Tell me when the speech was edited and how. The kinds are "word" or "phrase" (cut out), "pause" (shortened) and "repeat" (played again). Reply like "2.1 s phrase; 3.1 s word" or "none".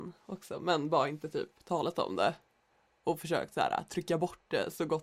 none